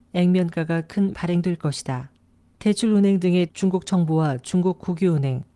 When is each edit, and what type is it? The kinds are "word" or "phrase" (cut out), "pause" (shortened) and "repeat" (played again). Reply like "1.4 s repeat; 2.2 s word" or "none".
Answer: 1.1 s phrase; 2.3 s pause; 3.5 s word